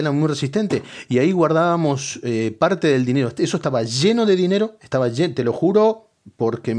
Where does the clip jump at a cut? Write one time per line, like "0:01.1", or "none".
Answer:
none